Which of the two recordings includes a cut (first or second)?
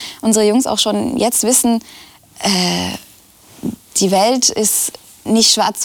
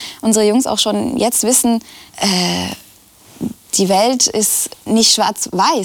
second